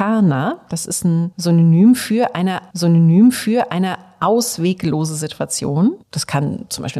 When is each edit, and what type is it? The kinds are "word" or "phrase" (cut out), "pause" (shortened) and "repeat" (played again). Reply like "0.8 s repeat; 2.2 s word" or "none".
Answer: 2.7 s repeat; 6.0 s pause